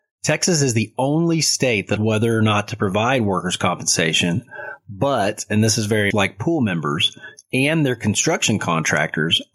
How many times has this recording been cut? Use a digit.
2